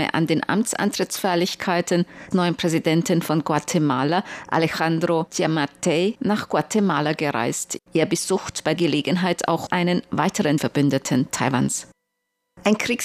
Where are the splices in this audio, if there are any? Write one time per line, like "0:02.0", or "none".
0:02.3
0:05.3
0:08.8
0:09.7
0:10.6